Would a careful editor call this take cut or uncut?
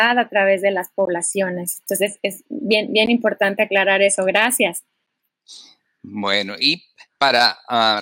uncut